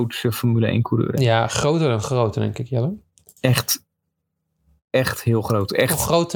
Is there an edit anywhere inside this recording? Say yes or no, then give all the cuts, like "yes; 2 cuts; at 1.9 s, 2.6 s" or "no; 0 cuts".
no; 0 cuts